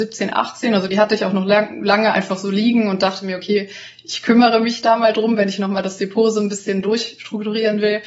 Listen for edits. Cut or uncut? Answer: uncut